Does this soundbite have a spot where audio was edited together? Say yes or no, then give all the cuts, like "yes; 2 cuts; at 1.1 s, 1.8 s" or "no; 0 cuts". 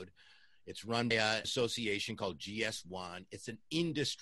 yes; 2 cuts; at 1.1 s, 1.4 s